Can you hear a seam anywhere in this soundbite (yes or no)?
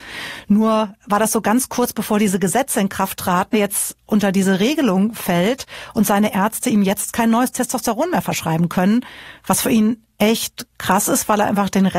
yes